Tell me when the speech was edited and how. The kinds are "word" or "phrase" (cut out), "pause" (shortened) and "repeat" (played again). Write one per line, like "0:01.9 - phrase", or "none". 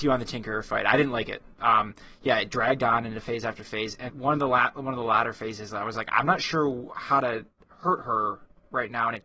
0:04.1 - word

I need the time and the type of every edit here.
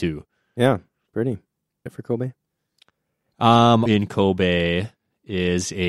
0:01.1 - word
0:01.9 - word
0:03.9 - word

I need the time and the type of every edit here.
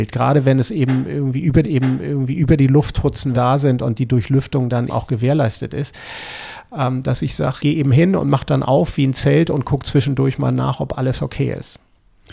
0:01.6 - repeat
0:03.3 - phrase
0:04.9 - word
0:07.6 - phrase

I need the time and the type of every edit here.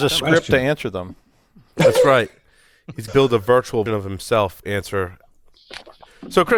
0:03.1 - word
0:03.9 - word
0:04.6 - word

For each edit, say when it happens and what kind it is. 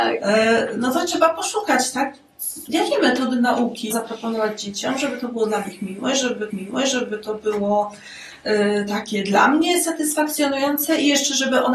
0:03.9 - word
0:06.5 - repeat

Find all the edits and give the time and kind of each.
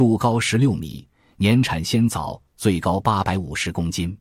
none

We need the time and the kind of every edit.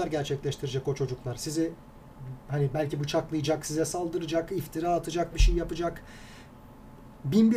0:05.3 - word

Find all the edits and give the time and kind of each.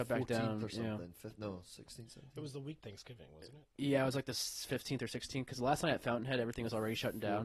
0:02.8 - word

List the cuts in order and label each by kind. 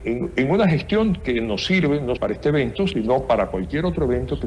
0:02.2 - word

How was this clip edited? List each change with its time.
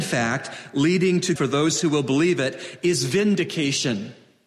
0:01.4 - word

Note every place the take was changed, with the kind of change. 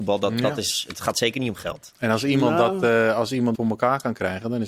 0:03.5 - word

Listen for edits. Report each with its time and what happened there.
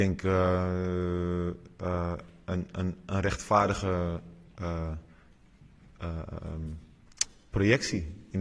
none

